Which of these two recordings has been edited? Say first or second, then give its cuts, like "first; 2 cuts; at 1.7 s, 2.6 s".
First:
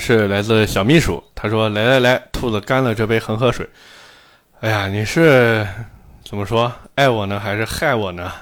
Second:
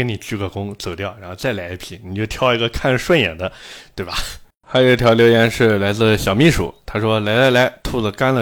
second; 1 cut; at 4.5 s